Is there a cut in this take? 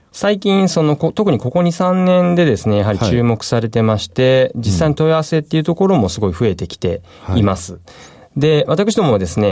no; 0 cuts

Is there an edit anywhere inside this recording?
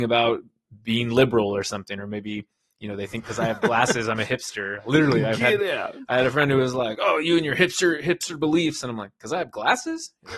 no; 0 cuts

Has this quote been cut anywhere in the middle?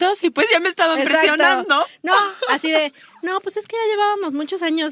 no; 0 cuts

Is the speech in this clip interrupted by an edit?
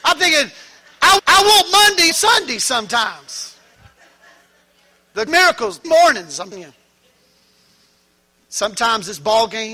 yes; 5 cuts; at 1.2 s, 2.1 s, 5.3 s, 5.8 s, 6.5 s

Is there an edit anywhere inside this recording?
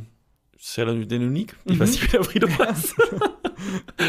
no; 0 cuts

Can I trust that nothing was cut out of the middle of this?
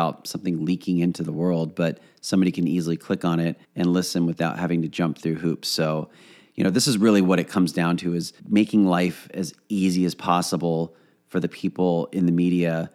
no; 2 cuts; at 3.6 s, 8.4 s

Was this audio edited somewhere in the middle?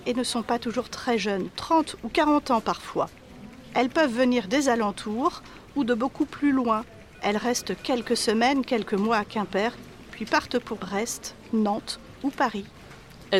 yes; 1 cut; at 10.8 s

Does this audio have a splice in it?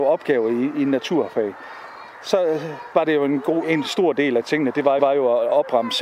yes; 2 cuts; at 3.6 s, 5.0 s

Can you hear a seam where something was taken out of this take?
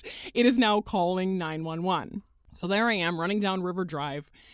no; 0 cuts

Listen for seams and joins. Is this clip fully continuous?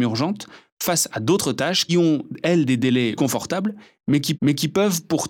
no; 3 cuts; at 1.9 s, 3.2 s, 4.3 s

